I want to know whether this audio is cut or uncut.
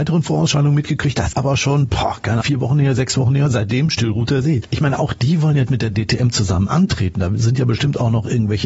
cut